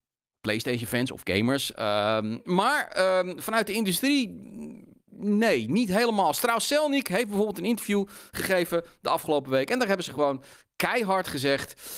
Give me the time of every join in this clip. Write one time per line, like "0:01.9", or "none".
none